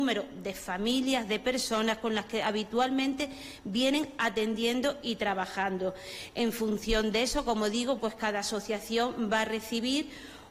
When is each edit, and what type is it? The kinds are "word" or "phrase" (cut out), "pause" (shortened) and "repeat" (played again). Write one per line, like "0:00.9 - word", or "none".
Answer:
0:08.0 - word